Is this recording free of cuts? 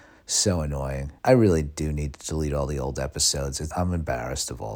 no; 2 cuts; at 1.2 s, 3.7 s

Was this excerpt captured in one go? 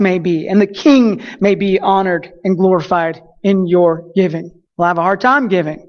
no; 1 cut; at 4.7 s

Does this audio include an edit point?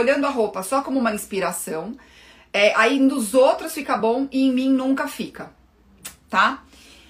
no; 0 cuts

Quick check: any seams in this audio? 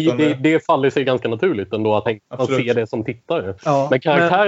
yes; 2 cuts; at 2.1 s, 3.6 s

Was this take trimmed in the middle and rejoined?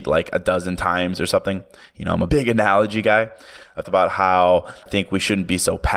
yes; 3 cuts; at 2.3 s, 3.8 s, 4.9 s

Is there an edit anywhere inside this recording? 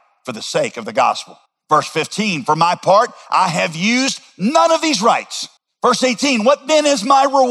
yes; 2 cuts; at 1.5 s, 5.6 s

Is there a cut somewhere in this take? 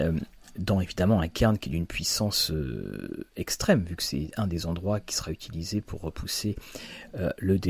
no; 0 cuts

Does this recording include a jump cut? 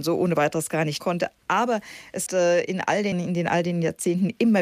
yes; 3 cuts; at 1.0 s, 2.3 s, 3.1 s

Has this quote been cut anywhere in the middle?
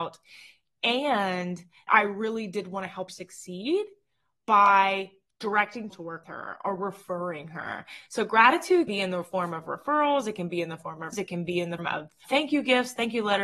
yes; 8 cuts; at 1.9 s, 3.1 s, 5.9 s, 6.2 s, 8.9 s, 11.1 s, 11.8 s, 12.2 s

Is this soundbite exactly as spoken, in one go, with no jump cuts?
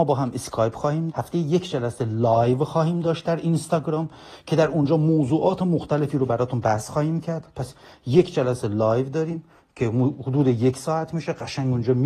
no; 1 cut; at 1.1 s

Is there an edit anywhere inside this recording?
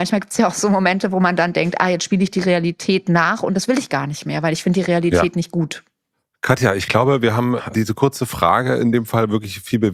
no; 0 cuts

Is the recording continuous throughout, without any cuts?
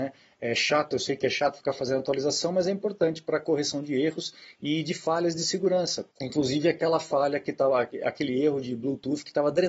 no; 1 cut; at 6.1 s

